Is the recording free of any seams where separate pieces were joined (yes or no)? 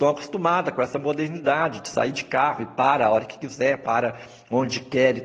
yes